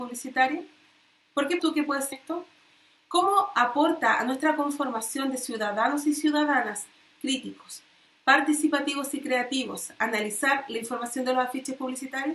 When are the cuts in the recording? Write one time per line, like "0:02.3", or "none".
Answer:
0:01.6
0:02.1

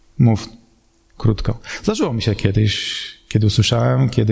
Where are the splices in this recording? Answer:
none

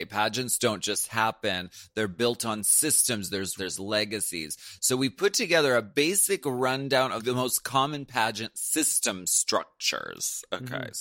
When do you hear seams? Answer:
0:03.6

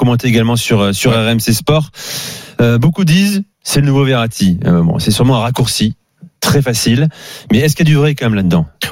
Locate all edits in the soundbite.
0:03.5

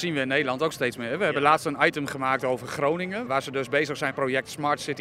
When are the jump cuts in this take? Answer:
0:03.3
0:04.1

